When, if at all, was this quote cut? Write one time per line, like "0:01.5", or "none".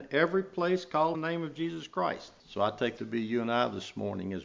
0:01.1
0:02.4
0:03.0